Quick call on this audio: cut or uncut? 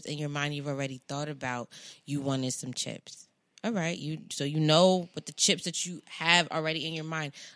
uncut